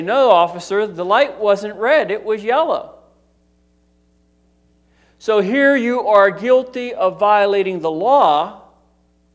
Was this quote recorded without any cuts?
yes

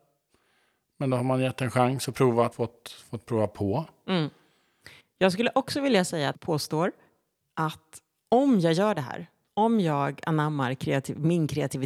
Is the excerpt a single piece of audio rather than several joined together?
no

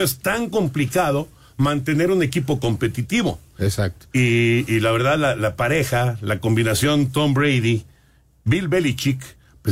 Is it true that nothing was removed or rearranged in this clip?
yes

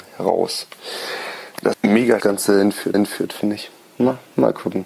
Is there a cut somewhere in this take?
yes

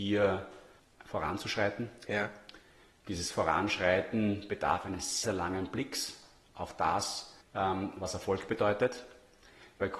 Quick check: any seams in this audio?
yes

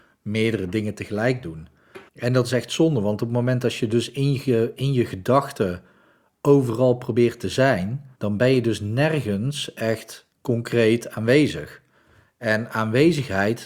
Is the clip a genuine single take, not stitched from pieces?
no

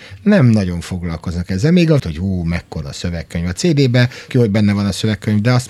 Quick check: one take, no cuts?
no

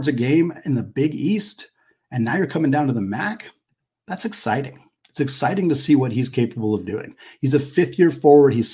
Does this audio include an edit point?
no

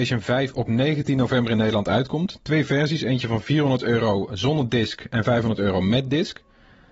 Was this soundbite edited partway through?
no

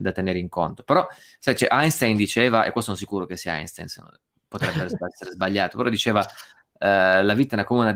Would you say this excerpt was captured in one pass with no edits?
yes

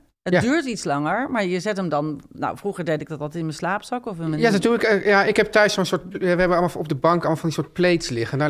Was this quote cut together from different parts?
no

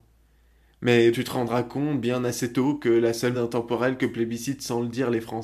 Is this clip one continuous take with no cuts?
no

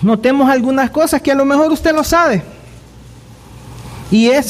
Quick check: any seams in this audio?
no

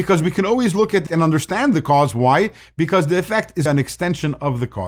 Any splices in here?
yes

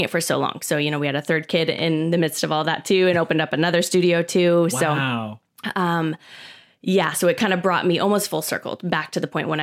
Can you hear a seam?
no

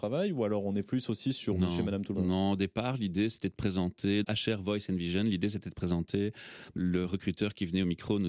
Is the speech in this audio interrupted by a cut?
yes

